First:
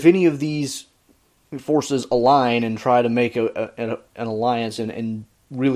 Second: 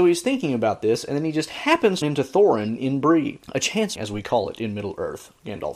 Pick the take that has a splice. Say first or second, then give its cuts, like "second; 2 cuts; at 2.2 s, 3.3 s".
second; 3 cuts; at 2.0 s, 3.4 s, 4.0 s